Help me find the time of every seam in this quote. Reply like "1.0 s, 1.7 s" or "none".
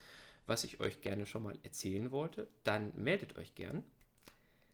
none